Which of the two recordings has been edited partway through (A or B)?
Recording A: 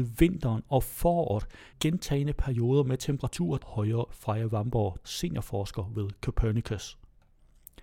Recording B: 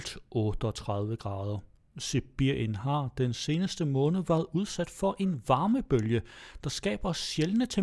A